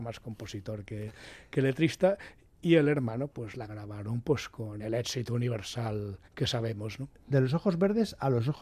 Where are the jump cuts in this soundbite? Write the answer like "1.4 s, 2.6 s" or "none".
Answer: 3.3 s, 3.7 s, 6.2 s